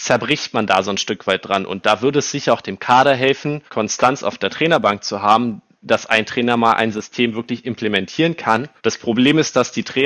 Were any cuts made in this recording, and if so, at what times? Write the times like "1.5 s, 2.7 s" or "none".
3.7 s, 8.8 s